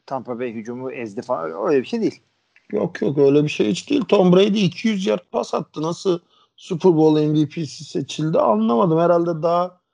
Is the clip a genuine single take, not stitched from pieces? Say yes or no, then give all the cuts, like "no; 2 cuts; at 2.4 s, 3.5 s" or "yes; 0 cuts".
yes; 0 cuts